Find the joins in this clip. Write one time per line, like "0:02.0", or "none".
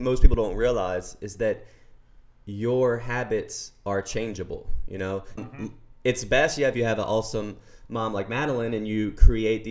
0:05.4